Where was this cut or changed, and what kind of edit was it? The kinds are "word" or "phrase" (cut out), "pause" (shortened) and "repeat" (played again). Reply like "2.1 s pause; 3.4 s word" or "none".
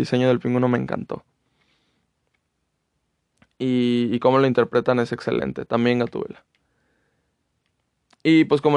none